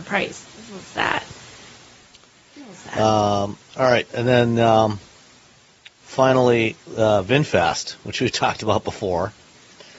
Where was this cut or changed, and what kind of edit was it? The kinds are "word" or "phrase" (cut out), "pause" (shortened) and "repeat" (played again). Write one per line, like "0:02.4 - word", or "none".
0:03.6 - pause
0:04.1 - pause
0:06.8 - pause